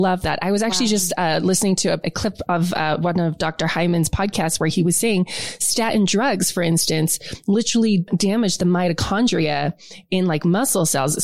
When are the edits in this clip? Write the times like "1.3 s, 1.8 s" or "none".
none